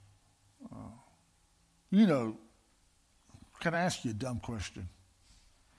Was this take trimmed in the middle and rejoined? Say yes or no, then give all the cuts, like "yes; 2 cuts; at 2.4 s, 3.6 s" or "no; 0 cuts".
no; 0 cuts